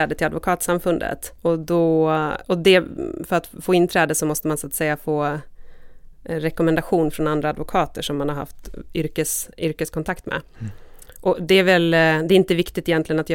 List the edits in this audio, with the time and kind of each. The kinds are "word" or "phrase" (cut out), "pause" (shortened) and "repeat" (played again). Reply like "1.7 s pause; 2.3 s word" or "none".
1.4 s pause; 2.4 s pause; 9.5 s pause